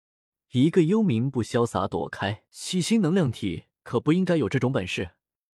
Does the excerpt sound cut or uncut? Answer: cut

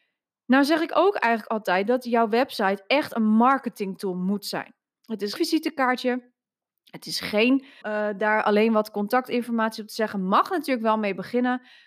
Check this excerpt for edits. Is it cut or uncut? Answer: cut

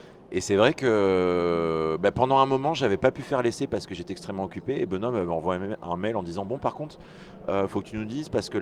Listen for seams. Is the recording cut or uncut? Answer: uncut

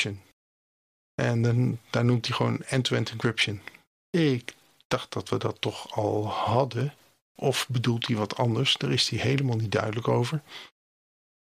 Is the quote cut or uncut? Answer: uncut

